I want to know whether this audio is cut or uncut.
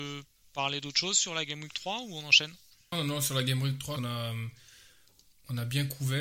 cut